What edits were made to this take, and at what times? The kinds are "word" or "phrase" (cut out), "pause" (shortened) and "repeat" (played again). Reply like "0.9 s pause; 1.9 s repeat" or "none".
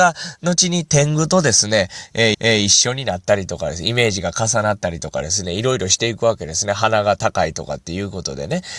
2.3 s repeat